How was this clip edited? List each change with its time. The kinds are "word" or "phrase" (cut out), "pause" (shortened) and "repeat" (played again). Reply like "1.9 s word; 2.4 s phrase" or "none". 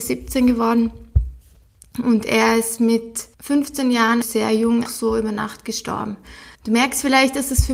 3.3 s pause; 4.2 s word; 4.9 s word; 6.5 s pause

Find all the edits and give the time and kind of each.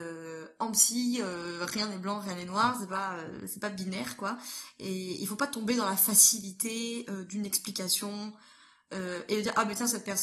none

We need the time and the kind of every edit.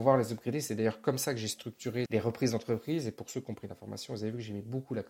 2.1 s word

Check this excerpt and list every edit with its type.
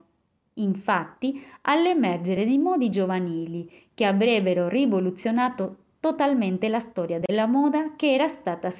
none

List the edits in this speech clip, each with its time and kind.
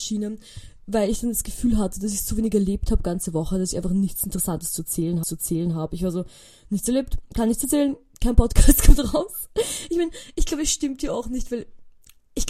5.2 s repeat

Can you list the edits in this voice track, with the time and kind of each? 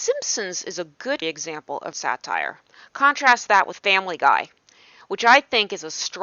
1.2 s word; 1.9 s word; 2.7 s pause; 3.8 s word

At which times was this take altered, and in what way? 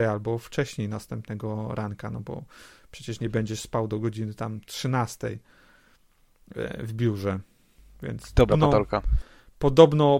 8.5 s word

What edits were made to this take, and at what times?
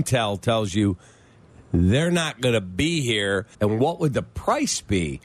3.5 s pause

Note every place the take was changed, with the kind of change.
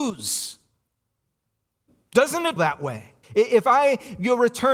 2.6 s word; 3.2 s pause

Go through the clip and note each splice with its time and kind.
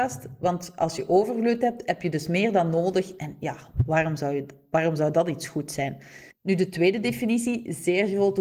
6.3 s pause

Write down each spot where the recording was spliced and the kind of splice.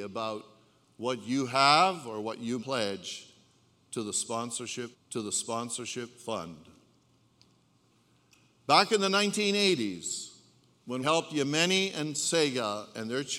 2.6 s word; 4.9 s repeat; 11.0 s word

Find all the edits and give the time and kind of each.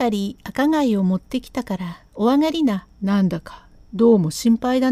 2.9 s pause

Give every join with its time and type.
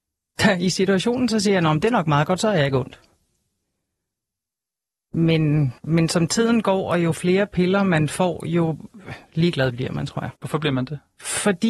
5.8 s pause; 10.4 s pause

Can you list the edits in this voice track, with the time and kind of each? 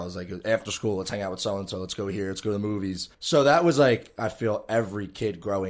3.1 s pause

